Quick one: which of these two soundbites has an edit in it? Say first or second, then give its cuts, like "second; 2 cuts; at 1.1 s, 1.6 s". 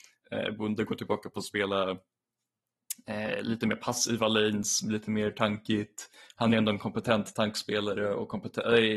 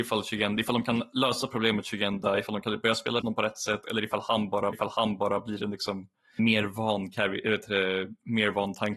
second; 3 cuts; at 3.2 s, 4.7 s, 6.4 s